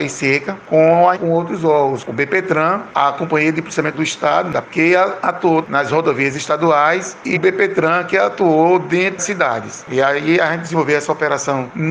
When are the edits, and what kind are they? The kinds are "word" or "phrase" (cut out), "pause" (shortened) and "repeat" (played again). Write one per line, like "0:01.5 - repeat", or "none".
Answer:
0:01.2 - word
0:02.0 - word
0:02.9 - word
0:03.9 - word
0:04.6 - word
0:05.6 - word
0:07.4 - word
0:09.2 - word

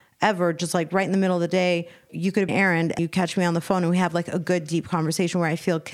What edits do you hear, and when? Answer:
0:02.1 - word
0:02.5 - phrase
0:03.0 - word

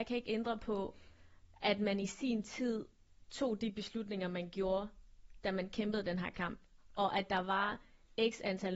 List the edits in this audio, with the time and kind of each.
none

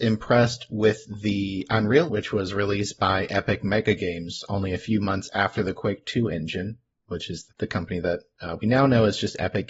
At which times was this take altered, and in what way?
0:02.1 - word
0:07.5 - word

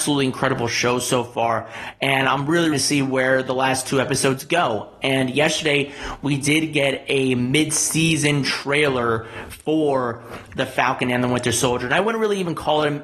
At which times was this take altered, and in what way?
0:02.7 - phrase

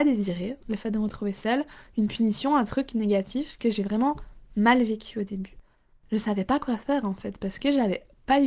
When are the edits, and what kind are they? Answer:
none

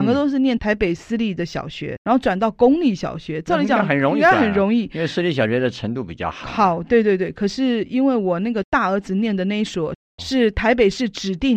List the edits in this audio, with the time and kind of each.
0:02.0 - word

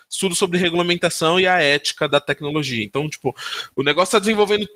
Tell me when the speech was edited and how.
0:02.1 - word

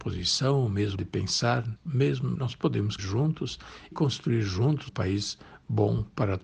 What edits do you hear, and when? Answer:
0:01.0 - word
0:01.8 - word
0:02.4 - word
0:03.0 - word
0:03.9 - word
0:04.9 - word

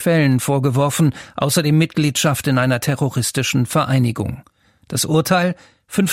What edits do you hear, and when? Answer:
none

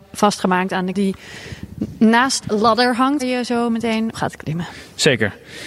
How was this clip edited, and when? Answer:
0:00.9 - word
0:02.4 - word
0:03.2 - word
0:04.1 - word

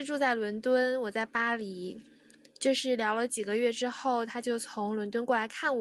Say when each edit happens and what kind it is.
none

